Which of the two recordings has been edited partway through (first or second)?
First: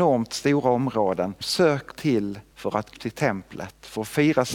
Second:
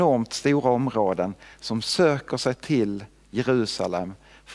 first